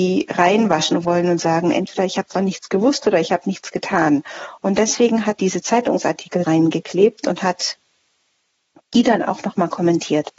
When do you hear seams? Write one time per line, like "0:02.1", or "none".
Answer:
0:05.4
0:06.4